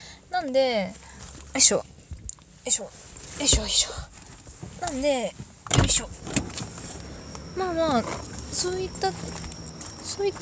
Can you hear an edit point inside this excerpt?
no; 0 cuts

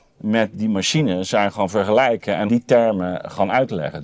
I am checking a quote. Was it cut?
yes; 1 cut; at 2.5 s

